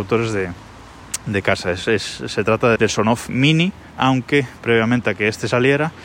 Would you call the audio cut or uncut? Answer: cut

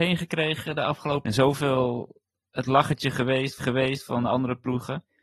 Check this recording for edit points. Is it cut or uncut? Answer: cut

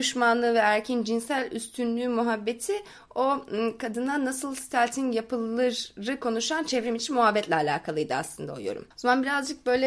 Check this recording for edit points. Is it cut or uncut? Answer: uncut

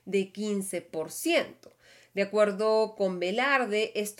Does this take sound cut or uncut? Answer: uncut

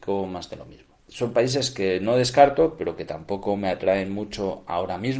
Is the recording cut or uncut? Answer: cut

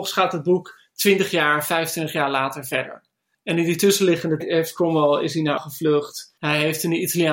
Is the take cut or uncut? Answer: cut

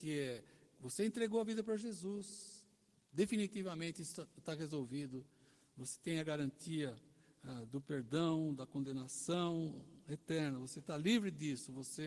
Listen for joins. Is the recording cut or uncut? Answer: uncut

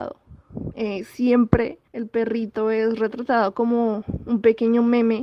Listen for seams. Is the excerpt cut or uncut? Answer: cut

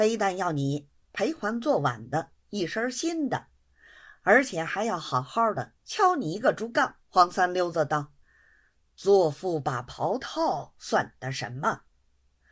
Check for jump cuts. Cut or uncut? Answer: cut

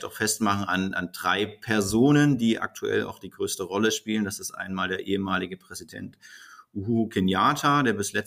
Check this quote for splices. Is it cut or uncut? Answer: uncut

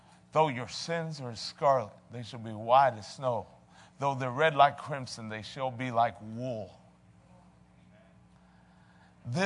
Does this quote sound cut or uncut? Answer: uncut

